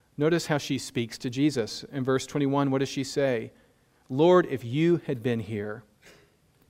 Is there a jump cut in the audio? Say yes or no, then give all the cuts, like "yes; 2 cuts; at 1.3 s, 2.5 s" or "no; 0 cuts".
no; 0 cuts